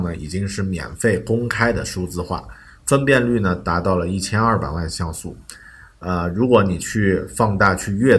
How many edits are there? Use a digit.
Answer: 0